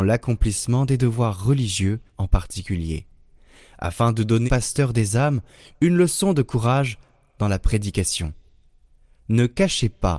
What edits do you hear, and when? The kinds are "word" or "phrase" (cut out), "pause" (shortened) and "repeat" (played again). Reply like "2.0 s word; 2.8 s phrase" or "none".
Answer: 2.1 s pause; 4.5 s word